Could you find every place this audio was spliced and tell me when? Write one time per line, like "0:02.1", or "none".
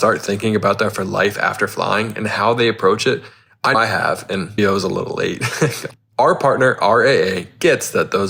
0:00.9
0:03.7
0:04.6